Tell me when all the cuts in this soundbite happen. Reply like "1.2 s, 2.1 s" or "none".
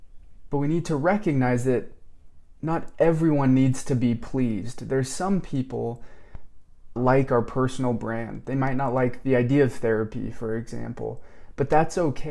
7.0 s